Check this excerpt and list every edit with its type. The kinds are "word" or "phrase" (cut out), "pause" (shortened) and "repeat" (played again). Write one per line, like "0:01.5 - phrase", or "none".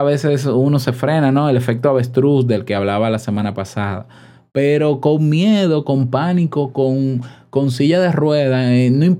none